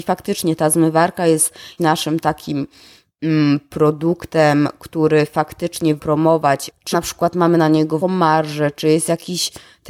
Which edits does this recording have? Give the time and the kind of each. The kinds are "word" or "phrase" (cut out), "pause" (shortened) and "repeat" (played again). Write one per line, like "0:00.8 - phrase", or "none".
0:01.8 - word
0:06.0 - word
0:06.9 - word
0:08.0 - word